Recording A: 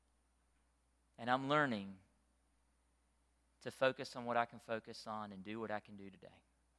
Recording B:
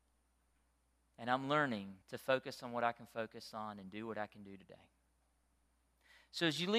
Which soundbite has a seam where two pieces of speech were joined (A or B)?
B